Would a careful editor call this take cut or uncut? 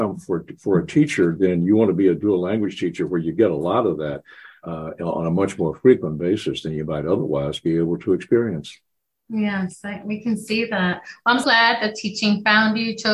cut